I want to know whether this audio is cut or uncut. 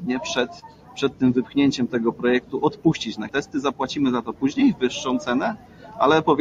cut